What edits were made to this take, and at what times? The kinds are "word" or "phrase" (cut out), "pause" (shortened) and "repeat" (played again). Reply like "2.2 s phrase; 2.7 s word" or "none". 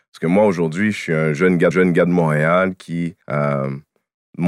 1.7 s repeat; 3.2 s pause